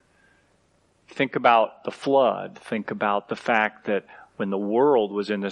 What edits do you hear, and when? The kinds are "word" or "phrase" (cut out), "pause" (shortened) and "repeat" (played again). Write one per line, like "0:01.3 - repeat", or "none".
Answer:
none